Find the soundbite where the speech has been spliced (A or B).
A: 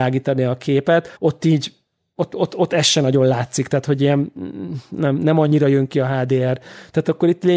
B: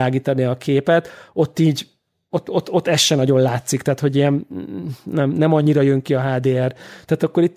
A